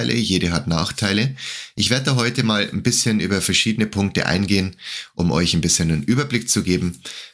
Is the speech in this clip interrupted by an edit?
no; 0 cuts

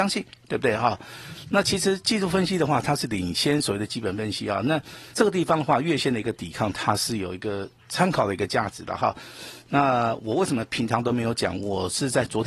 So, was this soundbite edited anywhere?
yes; 1 cut; at 5.1 s

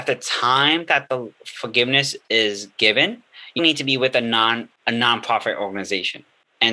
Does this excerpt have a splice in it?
yes; 1 cut; at 3.6 s

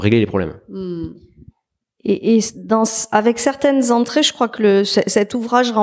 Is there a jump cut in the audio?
no; 0 cuts

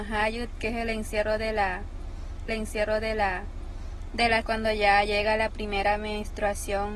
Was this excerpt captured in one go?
no; 3 cuts; at 2.5 s, 4.4 s, 5.1 s

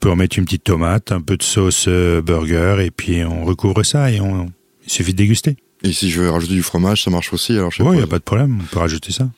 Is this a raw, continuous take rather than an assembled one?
yes; 0 cuts

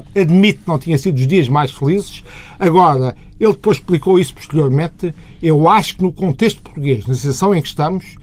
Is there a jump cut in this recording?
no; 0 cuts

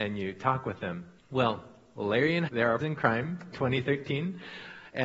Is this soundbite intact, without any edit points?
no; 4 cuts; at 1.2 s, 2.5 s, 2.8 s, 3.5 s

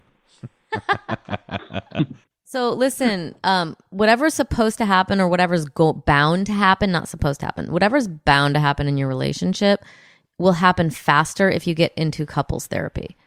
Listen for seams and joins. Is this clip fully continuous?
yes; 0 cuts

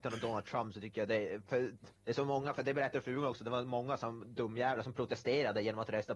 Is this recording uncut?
no; 1 cut; at 2.0 s

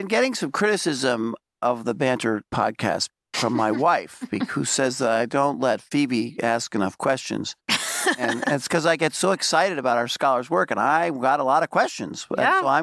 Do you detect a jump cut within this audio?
yes; 1 cut; at 2.5 s

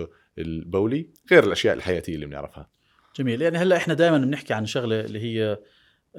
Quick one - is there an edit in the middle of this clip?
no; 0 cuts

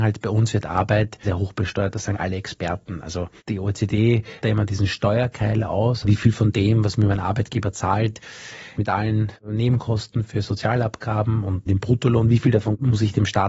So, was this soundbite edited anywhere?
yes; 7 cuts; at 1.2 s, 2.1 s, 3.4 s, 4.4 s, 6.0 s, 8.8 s, 11.7 s

